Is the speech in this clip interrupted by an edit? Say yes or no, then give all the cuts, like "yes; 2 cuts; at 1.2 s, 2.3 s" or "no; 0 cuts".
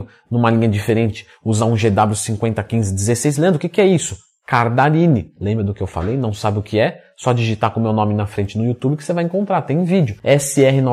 no; 0 cuts